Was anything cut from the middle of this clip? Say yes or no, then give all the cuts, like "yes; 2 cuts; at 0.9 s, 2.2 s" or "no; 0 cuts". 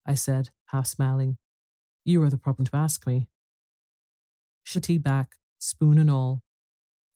yes; 2 cuts; at 2.6 s, 4.7 s